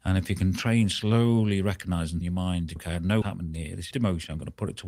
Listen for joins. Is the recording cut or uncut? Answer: cut